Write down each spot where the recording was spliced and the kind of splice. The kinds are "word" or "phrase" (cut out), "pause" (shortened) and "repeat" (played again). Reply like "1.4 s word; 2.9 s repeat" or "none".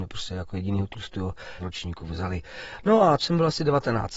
1.6 s word; 3.2 s word

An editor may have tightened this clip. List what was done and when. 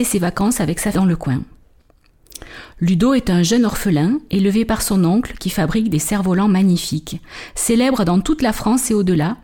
0.9 s word

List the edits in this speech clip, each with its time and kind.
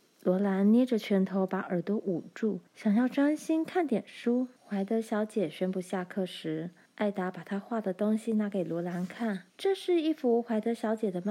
2.7 s pause; 4.6 s pause; 6.9 s pause; 9.5 s pause

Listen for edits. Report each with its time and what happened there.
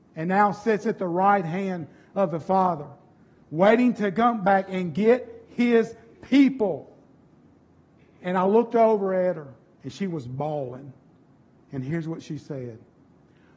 none

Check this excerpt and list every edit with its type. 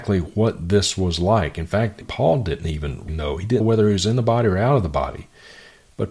2.0 s word; 3.1 s word; 3.6 s word

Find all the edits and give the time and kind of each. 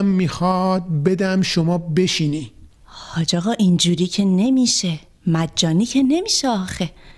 none

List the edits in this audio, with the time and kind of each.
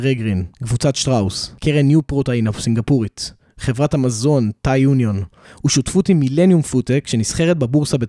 none

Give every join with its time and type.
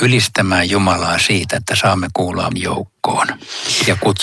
2.5 s word

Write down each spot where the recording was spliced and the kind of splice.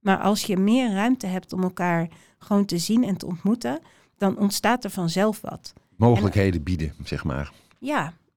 none

